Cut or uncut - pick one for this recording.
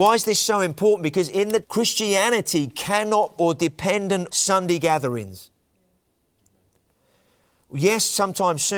cut